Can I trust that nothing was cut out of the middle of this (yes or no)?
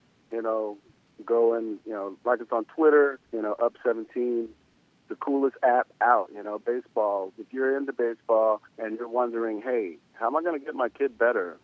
no